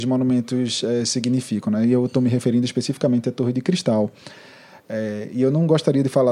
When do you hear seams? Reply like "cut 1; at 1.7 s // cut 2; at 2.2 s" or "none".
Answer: none